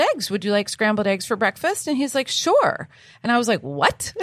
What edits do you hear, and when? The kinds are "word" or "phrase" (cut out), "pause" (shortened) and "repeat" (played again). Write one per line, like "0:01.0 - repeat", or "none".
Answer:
none